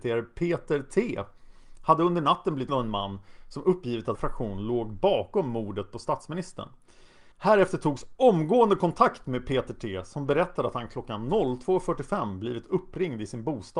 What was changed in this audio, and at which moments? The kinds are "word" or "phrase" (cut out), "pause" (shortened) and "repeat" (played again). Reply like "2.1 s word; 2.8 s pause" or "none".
2.7 s word; 4.1 s word; 7.3 s pause